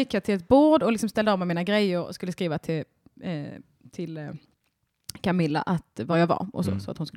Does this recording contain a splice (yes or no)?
no